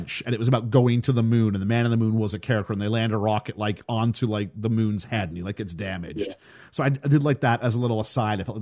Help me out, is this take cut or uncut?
uncut